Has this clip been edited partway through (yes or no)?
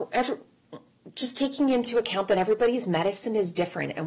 no